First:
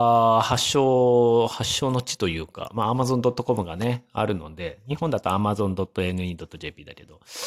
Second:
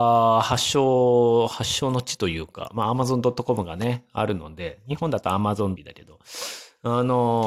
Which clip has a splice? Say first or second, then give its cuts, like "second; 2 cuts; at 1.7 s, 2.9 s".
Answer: second; 1 cut; at 5.8 s